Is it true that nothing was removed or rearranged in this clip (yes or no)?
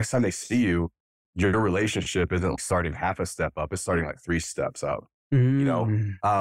no